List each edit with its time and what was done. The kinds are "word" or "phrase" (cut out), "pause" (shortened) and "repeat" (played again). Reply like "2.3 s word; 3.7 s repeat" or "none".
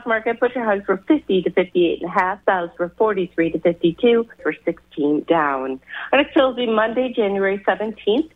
2.4 s pause; 4.4 s word; 5.3 s word